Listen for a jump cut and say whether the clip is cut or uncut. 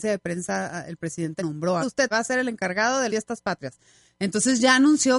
cut